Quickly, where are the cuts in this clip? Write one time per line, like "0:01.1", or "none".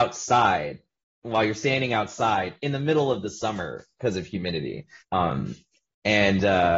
0:05.0